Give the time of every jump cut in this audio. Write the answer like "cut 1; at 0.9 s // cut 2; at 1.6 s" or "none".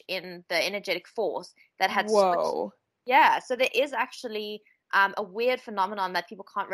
none